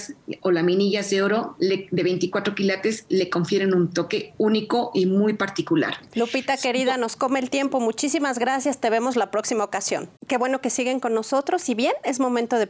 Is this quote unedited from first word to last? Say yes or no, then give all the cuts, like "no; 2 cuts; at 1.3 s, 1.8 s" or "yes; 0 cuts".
no; 1 cut; at 10.2 s